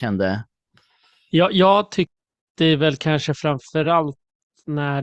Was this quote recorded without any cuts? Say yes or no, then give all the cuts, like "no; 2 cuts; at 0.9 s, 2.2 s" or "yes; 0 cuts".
yes; 0 cuts